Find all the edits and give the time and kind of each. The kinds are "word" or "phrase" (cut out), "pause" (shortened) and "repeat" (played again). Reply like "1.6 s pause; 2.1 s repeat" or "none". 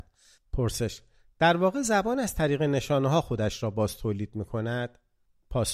none